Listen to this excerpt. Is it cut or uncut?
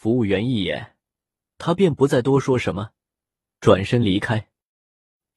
uncut